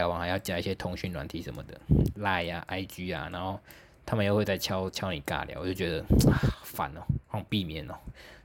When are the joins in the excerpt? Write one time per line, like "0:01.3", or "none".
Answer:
none